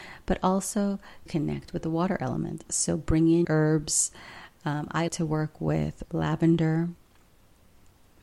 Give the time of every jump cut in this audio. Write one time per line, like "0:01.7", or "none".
0:01.3
0:03.4
0:05.1
0:06.0